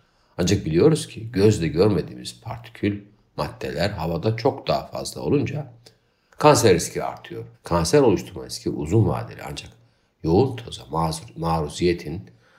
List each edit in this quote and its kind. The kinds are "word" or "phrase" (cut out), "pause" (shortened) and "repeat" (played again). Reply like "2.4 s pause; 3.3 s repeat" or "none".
7.5 s pause